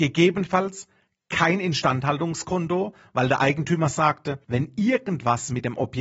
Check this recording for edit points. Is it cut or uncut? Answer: cut